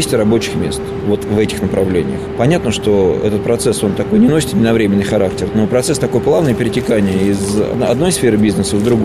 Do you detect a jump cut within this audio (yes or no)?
no